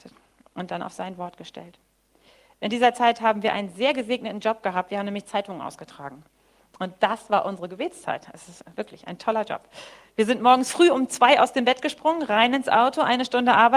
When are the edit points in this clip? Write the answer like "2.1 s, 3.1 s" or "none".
none

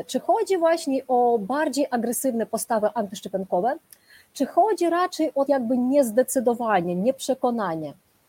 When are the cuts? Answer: 5.5 s

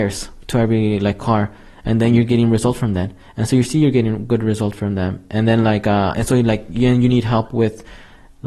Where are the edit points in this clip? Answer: 6.1 s

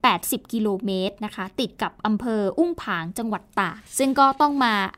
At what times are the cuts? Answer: 3.9 s

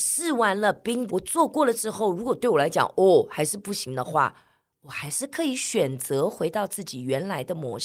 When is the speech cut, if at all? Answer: 1.1 s

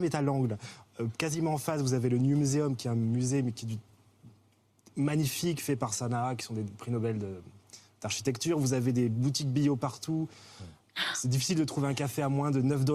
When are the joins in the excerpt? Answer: none

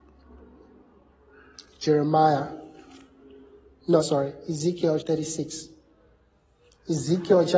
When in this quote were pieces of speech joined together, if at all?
4.0 s, 5.0 s

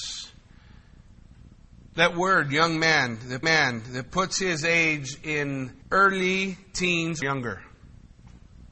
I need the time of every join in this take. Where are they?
3.4 s, 5.8 s, 7.2 s

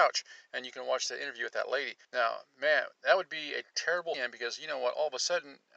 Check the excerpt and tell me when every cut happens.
2.0 s, 4.1 s

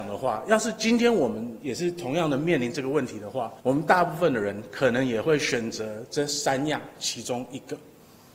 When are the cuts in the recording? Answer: 3.6 s

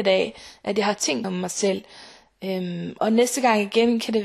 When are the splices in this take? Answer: 1.2 s, 3.0 s

